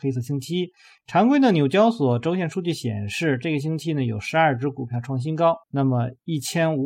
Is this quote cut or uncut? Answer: cut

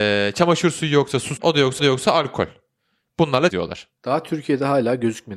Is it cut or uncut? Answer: cut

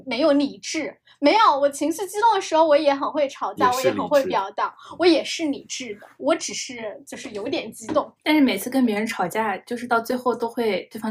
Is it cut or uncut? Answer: uncut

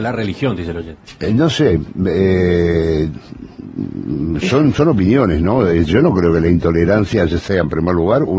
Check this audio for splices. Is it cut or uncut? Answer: uncut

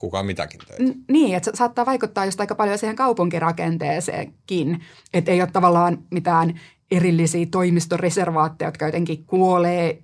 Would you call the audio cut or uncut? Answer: uncut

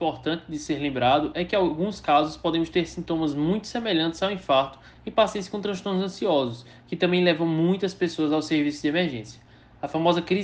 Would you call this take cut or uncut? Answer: uncut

